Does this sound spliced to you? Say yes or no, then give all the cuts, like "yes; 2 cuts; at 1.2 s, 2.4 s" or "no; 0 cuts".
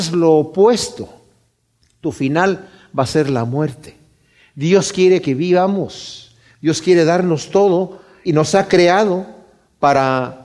yes; 1 cut; at 8.3 s